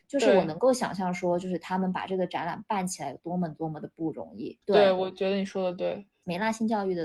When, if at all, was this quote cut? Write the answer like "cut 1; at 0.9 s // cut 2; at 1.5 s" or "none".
cut 1; at 4.6 s